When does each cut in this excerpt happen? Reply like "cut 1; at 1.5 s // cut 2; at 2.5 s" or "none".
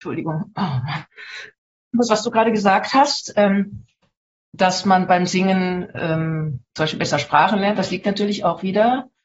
none